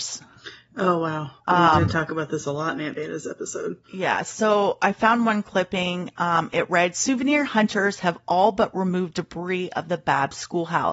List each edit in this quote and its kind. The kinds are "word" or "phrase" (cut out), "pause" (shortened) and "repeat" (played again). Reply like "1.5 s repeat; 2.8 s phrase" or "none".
1.4 s pause; 3.8 s pause